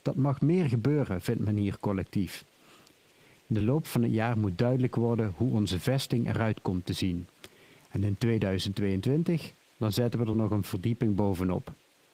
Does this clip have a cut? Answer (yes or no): no